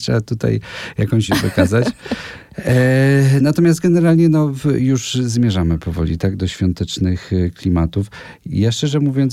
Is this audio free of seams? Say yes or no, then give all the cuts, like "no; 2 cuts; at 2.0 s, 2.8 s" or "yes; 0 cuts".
no; 1 cut; at 1.3 s